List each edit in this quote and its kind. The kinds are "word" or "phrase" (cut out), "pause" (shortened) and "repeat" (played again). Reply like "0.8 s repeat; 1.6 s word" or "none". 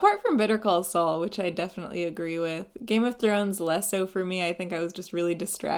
none